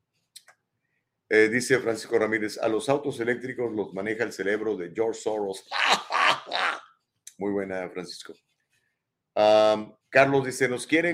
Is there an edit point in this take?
yes; 1 cut; at 10.0 s

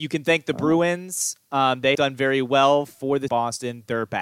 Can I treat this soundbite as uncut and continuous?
no; 2 cuts; at 1.9 s, 3.3 s

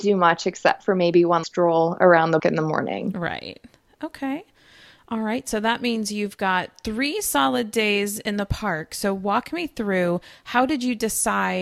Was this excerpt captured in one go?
no; 2 cuts; at 1.4 s, 2.4 s

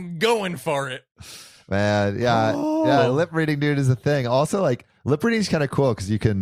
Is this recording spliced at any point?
no; 0 cuts

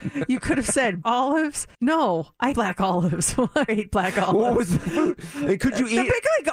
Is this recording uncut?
no; 4 cuts; at 1.0 s, 1.7 s, 2.5 s, 3.7 s

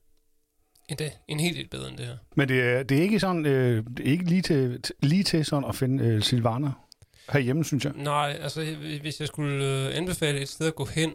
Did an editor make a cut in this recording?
no; 0 cuts

